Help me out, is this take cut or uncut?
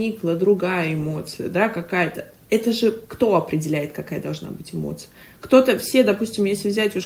uncut